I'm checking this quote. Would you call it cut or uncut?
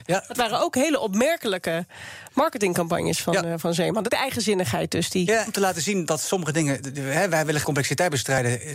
cut